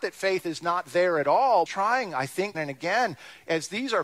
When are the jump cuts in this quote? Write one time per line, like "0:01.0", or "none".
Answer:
0:01.7
0:02.5